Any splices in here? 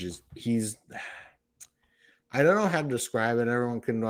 no; 0 cuts

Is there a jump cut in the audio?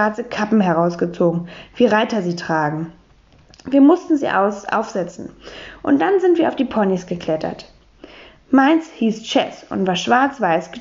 no; 0 cuts

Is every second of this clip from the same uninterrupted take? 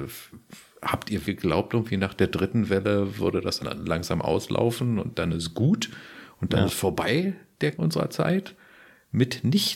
no; 3 cuts; at 1.2 s, 3.6 s, 7.7 s

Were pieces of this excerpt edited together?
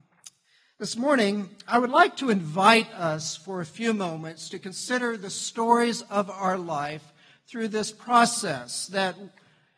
no; 0 cuts

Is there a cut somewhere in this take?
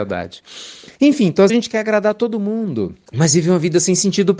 yes; 3 cuts; at 0.9 s, 1.5 s, 3.1 s

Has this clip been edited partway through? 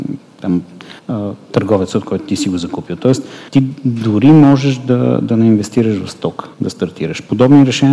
yes; 3 cuts; at 1.0 s, 3.5 s, 6.5 s

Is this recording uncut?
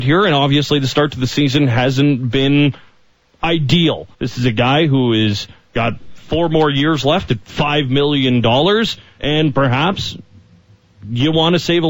no; 1 cut; at 4.1 s

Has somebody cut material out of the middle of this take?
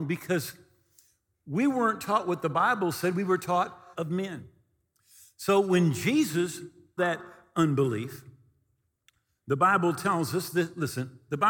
yes; 2 cuts; at 3.9 s, 7.0 s

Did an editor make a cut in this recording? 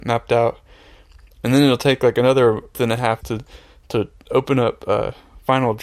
yes; 2 cuts; at 2.7 s, 3.2 s

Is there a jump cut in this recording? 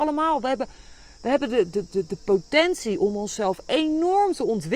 no; 0 cuts

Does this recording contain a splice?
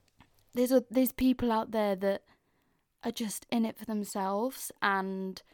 no; 0 cuts

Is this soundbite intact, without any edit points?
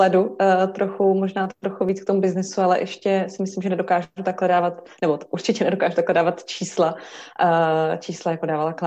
yes; 0 cuts

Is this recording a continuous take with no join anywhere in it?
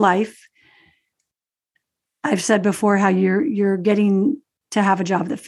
yes; 0 cuts

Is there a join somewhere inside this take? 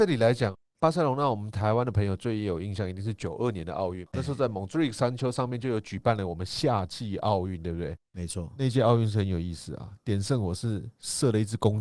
yes; 1 cut; at 4.0 s

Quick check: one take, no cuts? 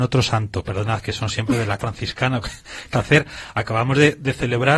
no; 3 cuts; at 1.8 s, 2.4 s, 2.9 s

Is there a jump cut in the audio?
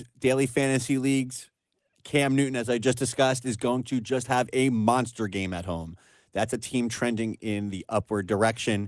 no; 0 cuts

